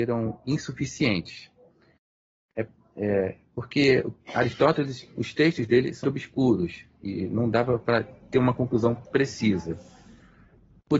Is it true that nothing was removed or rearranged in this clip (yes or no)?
no